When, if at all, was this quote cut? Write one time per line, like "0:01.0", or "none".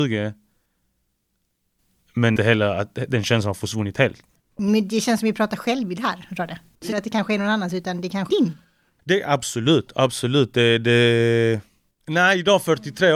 0:02.4
0:04.4
0:06.9
0:08.3